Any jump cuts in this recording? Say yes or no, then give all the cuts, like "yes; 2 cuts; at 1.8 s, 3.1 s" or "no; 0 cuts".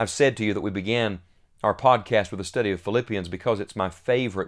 no; 0 cuts